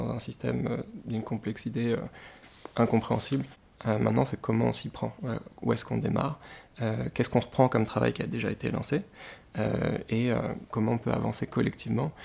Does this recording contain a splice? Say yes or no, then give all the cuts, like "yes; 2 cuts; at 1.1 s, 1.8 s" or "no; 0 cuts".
no; 0 cuts